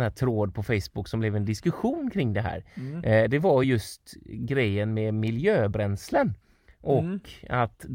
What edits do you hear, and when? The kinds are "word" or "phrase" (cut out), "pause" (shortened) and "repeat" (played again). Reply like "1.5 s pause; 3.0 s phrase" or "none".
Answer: none